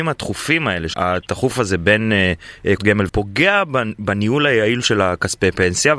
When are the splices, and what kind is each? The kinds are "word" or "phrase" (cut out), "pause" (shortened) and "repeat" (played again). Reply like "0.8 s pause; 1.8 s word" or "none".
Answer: 0.9 s word; 2.8 s word; 3.1 s phrase